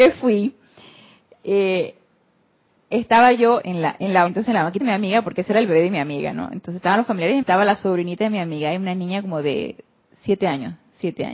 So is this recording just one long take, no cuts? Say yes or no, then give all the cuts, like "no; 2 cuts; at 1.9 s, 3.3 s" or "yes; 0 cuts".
no; 5 cuts; at 2.7 s, 3.6 s, 4.3 s, 4.8 s, 7.4 s